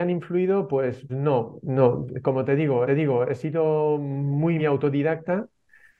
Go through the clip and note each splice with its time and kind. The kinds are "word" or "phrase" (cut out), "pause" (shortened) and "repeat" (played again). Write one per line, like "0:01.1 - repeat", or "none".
0:01.1 - word
0:02.9 - repeat
0:04.6 - word